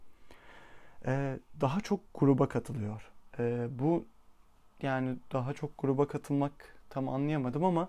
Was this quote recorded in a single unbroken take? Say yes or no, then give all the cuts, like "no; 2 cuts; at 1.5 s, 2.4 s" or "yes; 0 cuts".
yes; 0 cuts